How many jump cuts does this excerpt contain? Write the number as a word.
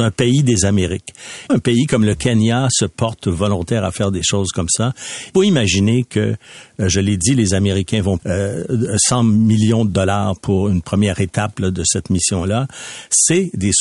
three